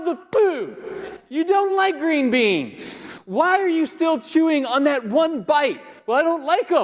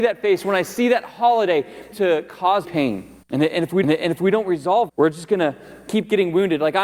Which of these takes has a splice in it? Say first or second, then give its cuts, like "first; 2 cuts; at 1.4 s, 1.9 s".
second; 5 cuts; at 1.9 s, 2.6 s, 3.2 s, 3.8 s, 4.9 s